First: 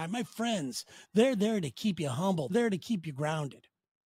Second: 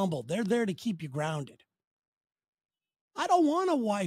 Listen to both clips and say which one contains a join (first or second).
first